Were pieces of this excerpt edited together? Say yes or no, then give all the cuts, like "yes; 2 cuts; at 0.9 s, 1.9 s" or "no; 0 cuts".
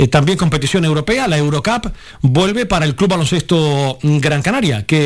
no; 0 cuts